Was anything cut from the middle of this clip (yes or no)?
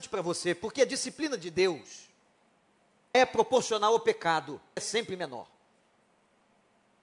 yes